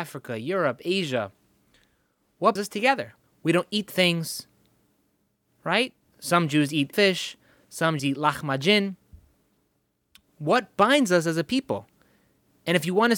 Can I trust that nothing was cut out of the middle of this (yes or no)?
no